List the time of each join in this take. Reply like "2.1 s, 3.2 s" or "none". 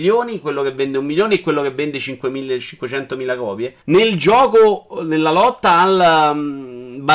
3.8 s

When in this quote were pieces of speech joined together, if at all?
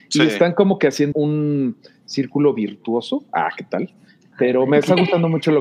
1.1 s

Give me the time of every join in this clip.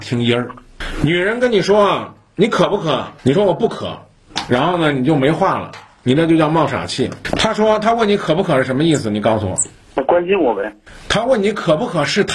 3.2 s

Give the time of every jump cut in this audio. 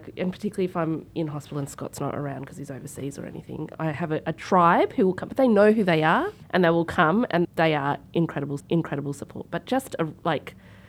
6.4 s, 7.4 s, 8.6 s

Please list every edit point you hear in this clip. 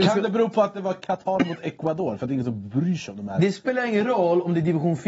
none

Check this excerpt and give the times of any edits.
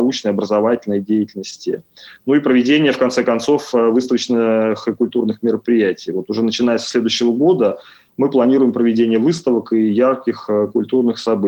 none

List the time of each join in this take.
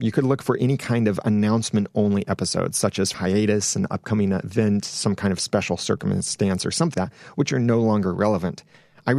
3.1 s, 6.9 s

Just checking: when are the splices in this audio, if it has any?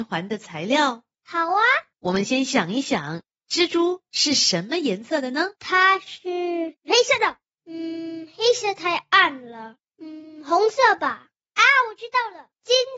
5.5 s

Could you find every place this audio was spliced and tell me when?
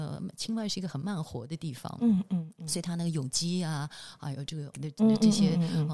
4.7 s

